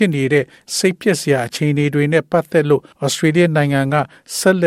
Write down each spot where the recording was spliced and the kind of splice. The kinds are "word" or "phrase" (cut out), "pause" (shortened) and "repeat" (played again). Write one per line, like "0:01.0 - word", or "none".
0:02.9 - pause